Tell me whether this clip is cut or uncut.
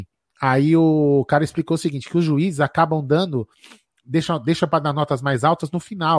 uncut